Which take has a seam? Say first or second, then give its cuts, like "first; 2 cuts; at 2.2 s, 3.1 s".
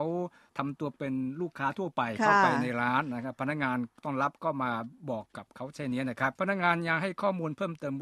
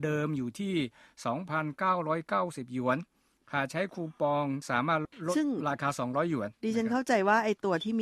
first; 1 cut; at 6.4 s